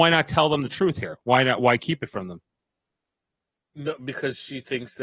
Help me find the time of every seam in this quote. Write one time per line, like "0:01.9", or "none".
none